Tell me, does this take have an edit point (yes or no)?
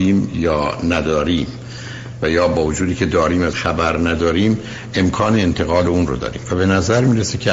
yes